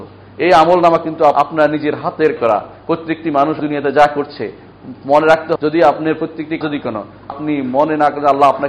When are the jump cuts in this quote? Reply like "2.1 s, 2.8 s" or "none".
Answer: 1.3 s, 2.4 s, 3.6 s, 5.6 s, 6.6 s, 7.3 s